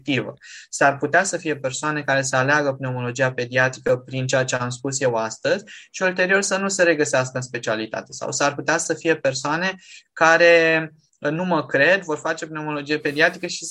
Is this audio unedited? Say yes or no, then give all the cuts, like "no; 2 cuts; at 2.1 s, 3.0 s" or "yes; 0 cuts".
yes; 0 cuts